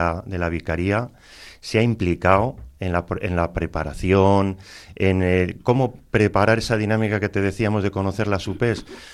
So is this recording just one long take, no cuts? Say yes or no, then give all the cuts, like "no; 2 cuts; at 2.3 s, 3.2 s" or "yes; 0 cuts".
yes; 0 cuts